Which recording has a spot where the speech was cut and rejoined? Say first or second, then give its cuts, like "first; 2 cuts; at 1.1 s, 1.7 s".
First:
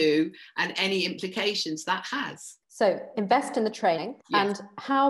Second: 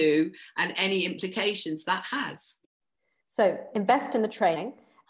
first; 2 cuts; at 2.6 s, 4.2 s